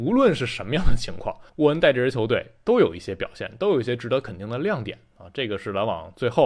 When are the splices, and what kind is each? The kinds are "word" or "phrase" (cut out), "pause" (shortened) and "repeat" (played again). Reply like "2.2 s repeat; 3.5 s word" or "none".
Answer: 1.5 s pause